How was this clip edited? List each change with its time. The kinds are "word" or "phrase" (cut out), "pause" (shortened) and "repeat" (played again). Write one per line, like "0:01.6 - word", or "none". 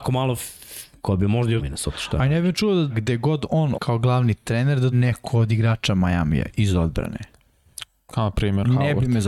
0:01.0 - word
0:01.6 - word
0:02.9 - word
0:03.7 - word
0:04.9 - word